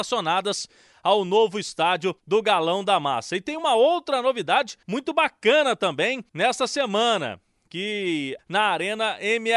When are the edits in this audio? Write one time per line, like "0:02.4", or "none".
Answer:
0:02.2
0:04.8
0:06.3
0:08.4